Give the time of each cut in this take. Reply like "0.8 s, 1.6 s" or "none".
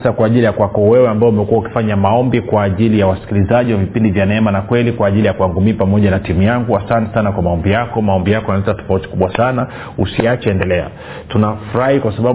none